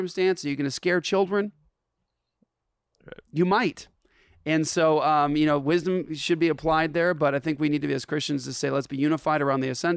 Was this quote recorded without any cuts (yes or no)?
yes